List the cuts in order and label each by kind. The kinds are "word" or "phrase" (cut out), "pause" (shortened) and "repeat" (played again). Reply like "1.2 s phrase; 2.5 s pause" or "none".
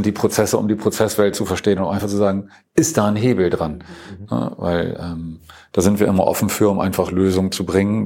none